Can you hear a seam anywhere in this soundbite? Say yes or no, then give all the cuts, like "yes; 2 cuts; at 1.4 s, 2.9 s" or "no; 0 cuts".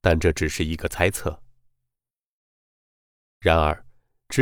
no; 0 cuts